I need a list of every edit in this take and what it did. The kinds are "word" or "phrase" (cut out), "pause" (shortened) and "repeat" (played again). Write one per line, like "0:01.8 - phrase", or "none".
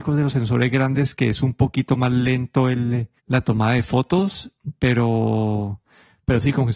0:03.2 - pause